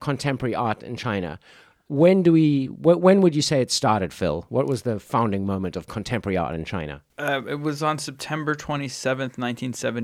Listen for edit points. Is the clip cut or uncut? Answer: uncut